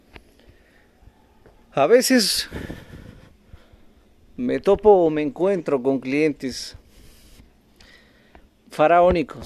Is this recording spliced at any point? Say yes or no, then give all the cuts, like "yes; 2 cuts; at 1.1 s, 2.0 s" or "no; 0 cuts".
no; 0 cuts